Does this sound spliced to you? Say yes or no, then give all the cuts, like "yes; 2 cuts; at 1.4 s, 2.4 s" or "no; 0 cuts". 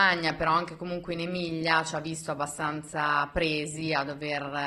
no; 0 cuts